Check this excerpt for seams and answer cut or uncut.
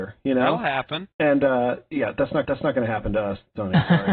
cut